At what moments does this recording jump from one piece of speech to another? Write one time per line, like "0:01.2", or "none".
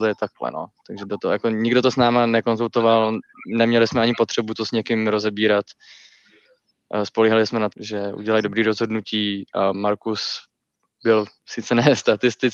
0:07.7